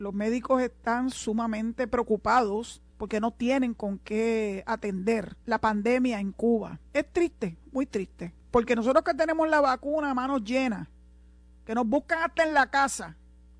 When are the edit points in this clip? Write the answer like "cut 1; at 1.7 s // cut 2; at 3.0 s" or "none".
cut 1; at 2.9 s // cut 2; at 5.4 s // cut 3; at 6.9 s // cut 4; at 8.4 s